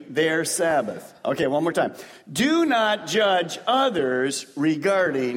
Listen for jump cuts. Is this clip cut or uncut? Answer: uncut